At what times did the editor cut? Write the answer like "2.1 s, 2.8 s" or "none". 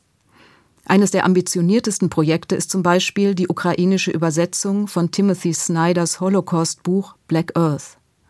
none